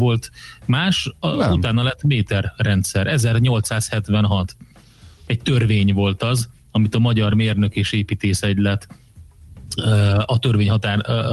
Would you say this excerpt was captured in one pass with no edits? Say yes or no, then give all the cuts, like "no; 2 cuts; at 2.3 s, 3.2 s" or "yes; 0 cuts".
yes; 0 cuts